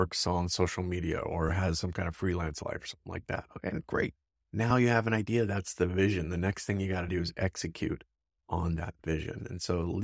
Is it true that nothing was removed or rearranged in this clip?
yes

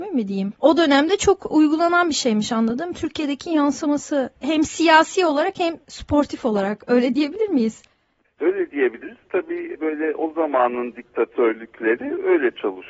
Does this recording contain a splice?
no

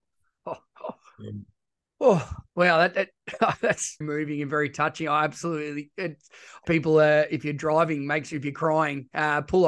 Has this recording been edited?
yes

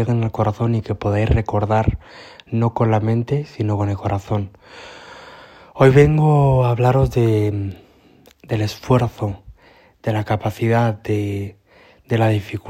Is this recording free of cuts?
yes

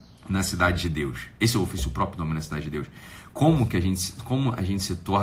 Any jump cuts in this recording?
no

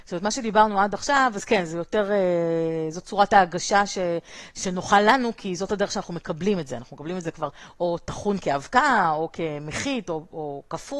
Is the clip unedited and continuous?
yes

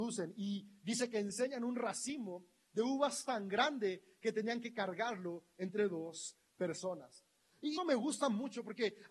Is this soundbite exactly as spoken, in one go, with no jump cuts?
no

